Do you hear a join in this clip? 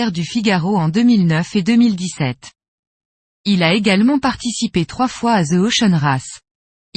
no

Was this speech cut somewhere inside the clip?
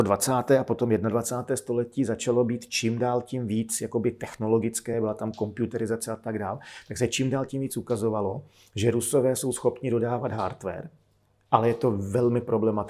no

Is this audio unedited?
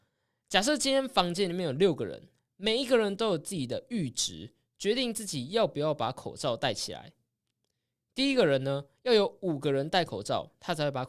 yes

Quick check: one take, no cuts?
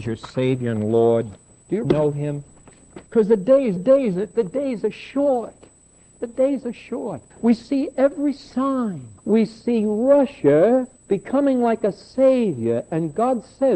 no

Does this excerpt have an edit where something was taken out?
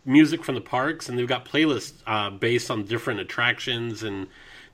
no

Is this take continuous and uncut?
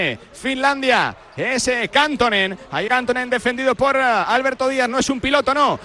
no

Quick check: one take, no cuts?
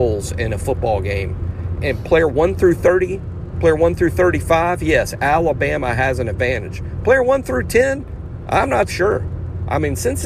no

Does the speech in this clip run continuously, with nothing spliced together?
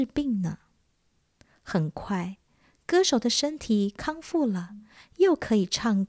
yes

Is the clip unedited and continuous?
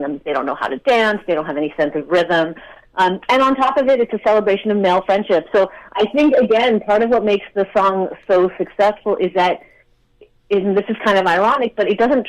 yes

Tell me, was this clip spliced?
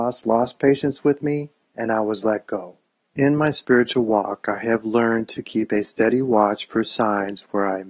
no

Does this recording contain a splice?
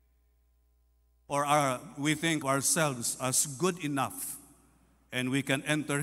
yes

